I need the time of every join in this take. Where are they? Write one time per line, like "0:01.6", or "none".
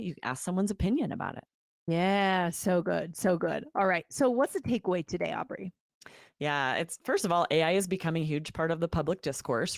none